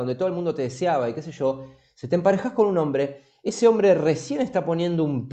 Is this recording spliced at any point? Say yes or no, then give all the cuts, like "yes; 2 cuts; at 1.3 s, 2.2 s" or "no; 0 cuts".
no; 0 cuts